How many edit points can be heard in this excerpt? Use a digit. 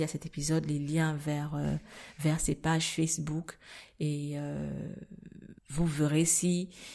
1